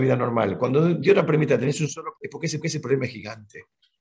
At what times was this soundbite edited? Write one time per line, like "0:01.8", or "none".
0:02.2
0:02.6